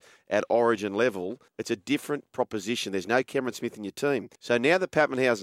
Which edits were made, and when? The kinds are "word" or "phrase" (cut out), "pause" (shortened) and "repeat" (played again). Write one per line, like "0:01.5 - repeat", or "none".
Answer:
0:01.5 - pause
0:04.4 - pause